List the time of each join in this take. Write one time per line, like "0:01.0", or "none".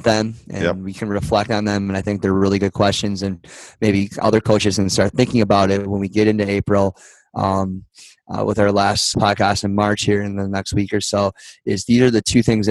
0:09.1